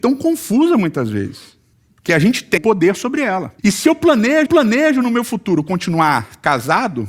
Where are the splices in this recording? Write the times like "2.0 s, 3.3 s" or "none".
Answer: 1.7 s, 2.6 s, 3.6 s, 4.5 s